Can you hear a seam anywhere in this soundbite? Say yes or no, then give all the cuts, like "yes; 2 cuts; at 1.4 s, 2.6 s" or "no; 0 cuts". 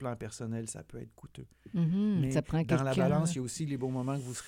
no; 0 cuts